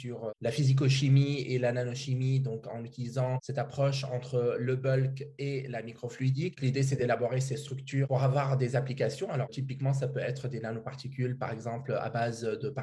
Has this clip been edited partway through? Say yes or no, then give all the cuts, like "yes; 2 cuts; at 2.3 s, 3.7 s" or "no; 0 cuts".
no; 0 cuts